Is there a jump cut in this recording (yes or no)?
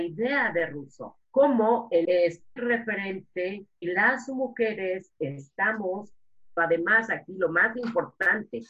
yes